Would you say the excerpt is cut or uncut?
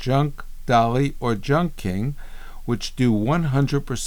uncut